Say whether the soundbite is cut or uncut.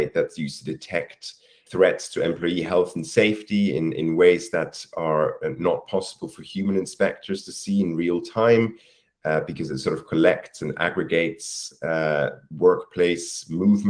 cut